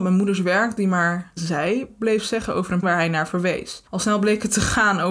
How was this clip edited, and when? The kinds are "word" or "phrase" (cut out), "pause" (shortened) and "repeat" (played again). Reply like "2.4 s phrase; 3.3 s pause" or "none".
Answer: 1.4 s word; 2.8 s word; 3.9 s pause